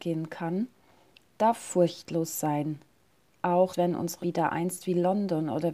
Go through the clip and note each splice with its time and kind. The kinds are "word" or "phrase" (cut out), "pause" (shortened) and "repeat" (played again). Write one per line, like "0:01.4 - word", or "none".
0:03.7 - word
0:04.2 - word